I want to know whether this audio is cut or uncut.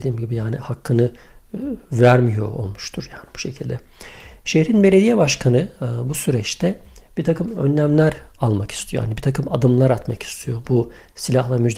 uncut